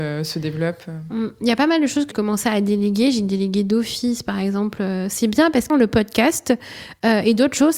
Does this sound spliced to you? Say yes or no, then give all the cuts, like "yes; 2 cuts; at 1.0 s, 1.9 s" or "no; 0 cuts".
yes; 2 cuts; at 2.1 s, 5.7 s